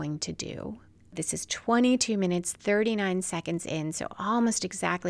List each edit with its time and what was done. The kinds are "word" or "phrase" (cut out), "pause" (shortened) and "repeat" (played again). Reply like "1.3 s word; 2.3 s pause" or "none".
none